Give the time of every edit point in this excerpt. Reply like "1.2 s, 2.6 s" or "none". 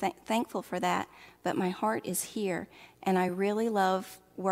none